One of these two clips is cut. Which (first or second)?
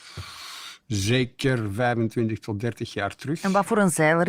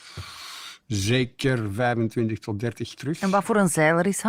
second